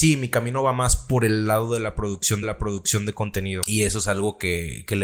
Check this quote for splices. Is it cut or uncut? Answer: cut